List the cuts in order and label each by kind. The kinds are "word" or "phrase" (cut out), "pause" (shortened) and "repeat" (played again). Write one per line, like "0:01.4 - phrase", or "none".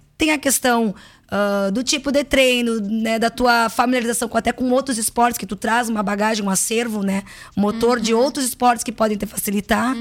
none